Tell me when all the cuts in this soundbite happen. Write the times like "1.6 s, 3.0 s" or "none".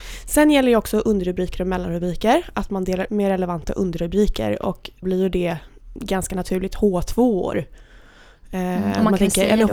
3.1 s, 5.0 s